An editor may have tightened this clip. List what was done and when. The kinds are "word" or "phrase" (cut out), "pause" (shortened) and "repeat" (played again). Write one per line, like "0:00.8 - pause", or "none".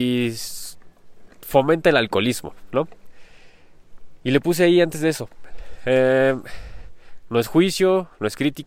0:01.3 - pause